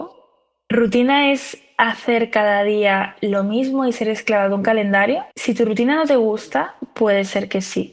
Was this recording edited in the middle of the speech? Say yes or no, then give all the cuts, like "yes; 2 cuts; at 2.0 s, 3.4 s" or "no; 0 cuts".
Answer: yes; 1 cut; at 5.3 s